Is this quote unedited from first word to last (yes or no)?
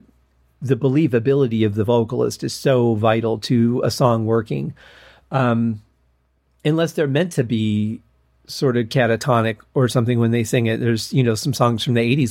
yes